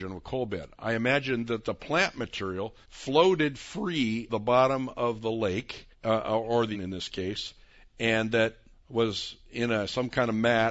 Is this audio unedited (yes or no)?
no